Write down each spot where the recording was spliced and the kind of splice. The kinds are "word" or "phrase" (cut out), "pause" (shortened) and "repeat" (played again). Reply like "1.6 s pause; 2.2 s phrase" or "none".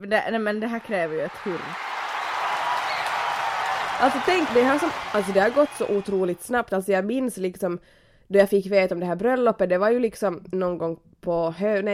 4.5 s word

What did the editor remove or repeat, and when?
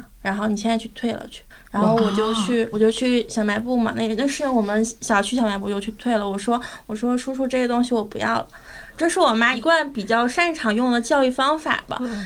1.5 s pause

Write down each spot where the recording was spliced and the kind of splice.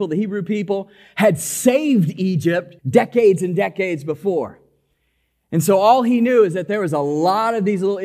2.8 s pause

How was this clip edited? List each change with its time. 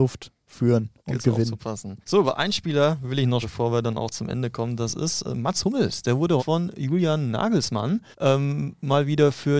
1.0 s pause; 2.0 s pause; 3.4 s word; 6.4 s word; 8.1 s pause

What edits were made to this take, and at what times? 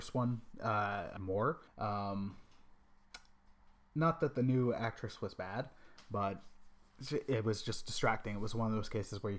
1.2 s word; 1.7 s pause

